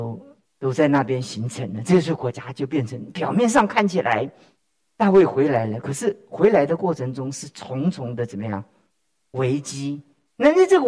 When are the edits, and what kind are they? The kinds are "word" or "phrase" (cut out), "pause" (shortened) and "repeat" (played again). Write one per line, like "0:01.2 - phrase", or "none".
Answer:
none